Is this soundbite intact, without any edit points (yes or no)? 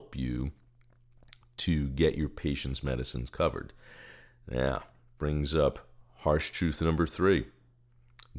yes